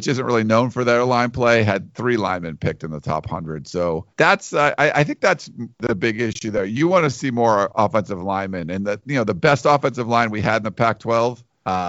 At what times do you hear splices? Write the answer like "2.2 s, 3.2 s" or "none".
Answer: 4.1 s, 5.7 s